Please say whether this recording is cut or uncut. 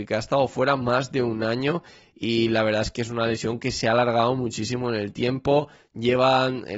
uncut